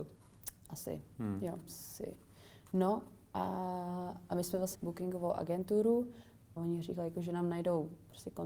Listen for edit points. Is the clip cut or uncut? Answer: cut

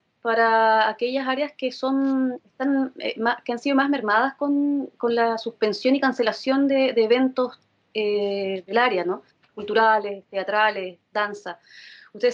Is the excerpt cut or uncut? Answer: uncut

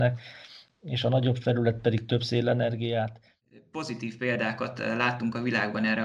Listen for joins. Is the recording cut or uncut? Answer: uncut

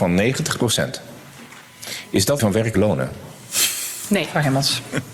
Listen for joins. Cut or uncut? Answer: cut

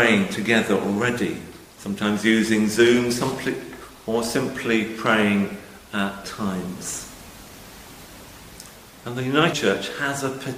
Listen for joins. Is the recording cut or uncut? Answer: cut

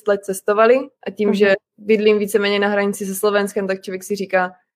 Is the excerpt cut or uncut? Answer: cut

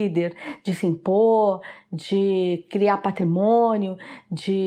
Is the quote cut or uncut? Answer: uncut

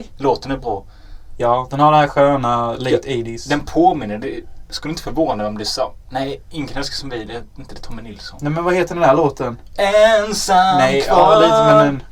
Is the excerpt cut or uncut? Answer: uncut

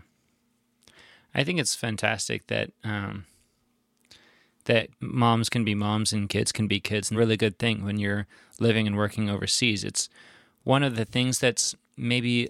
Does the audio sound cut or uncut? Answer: cut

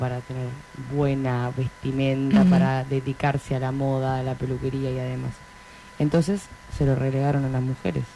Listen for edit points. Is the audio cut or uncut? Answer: uncut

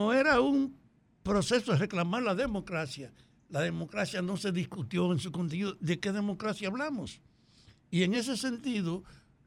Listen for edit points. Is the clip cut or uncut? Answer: uncut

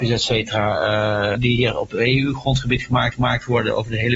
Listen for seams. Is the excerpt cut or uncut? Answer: cut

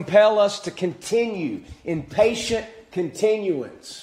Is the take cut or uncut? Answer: uncut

